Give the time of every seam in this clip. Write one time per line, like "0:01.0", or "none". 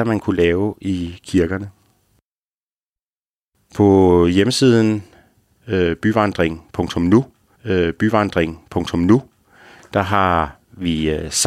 0:07.5